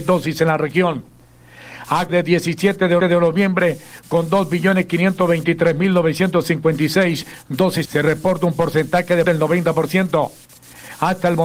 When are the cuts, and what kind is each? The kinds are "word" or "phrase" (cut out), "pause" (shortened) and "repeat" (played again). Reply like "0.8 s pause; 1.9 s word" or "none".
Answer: 2.1 s word; 3.0 s repeat; 7.9 s word; 9.2 s word